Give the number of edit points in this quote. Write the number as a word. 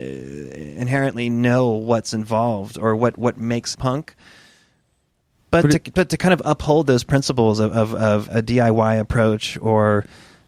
two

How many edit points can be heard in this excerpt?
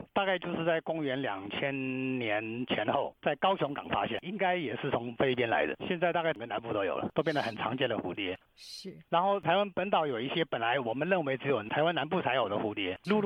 one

